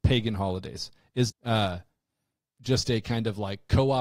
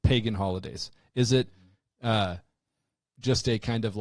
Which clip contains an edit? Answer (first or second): first